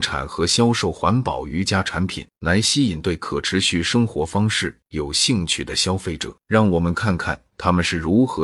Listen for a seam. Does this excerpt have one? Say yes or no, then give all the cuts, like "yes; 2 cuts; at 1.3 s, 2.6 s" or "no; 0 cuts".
yes; 2 cuts; at 2.3 s, 6.4 s